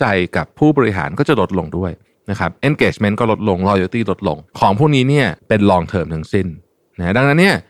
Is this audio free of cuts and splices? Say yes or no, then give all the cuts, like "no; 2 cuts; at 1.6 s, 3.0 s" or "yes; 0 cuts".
no; 2 cuts; at 4.5 s, 5.4 s